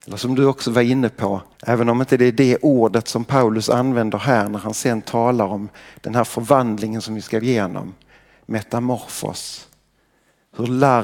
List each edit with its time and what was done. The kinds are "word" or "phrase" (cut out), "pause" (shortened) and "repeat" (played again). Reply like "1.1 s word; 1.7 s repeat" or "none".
1.5 s pause; 7.4 s word

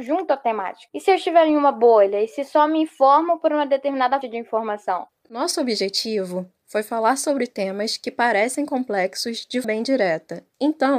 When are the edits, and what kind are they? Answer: 4.2 s word; 9.6 s word

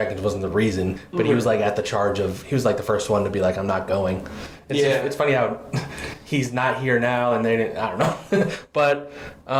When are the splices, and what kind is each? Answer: none

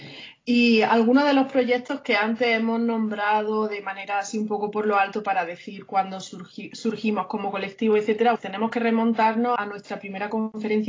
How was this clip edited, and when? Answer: 8.4 s word; 9.6 s word

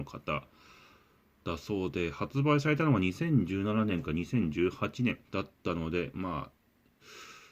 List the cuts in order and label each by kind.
5.2 s pause

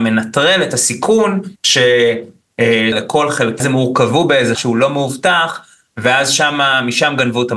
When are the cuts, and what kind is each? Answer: 1.6 s pause; 2.9 s phrase; 3.6 s phrase; 4.5 s word

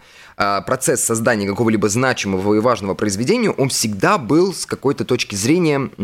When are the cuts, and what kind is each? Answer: none

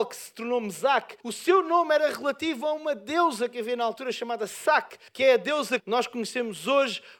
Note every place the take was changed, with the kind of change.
1.2 s pause; 5.1 s pause; 5.8 s word

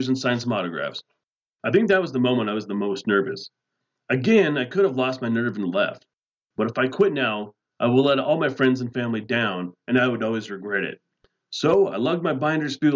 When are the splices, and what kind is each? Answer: none

